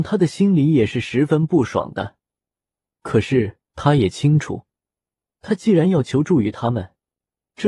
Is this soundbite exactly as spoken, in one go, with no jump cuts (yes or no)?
no